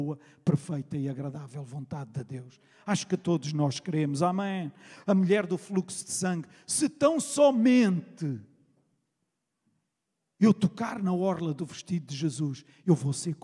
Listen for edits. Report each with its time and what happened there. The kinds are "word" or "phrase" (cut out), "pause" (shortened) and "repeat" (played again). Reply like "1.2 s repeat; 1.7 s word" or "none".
none